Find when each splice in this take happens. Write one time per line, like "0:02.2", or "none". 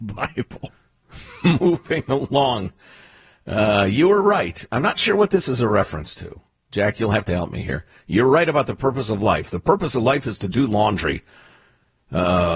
none